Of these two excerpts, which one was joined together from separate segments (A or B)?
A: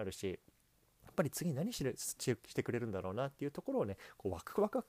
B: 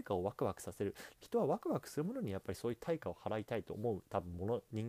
B